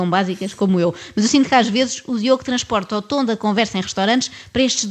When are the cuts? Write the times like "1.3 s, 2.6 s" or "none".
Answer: none